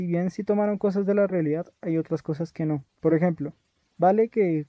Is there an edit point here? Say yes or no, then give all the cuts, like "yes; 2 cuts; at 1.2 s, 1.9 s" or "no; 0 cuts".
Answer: no; 0 cuts